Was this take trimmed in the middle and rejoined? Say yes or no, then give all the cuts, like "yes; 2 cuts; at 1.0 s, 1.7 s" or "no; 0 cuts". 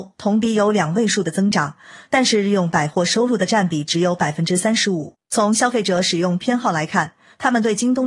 yes; 1 cut; at 5.2 s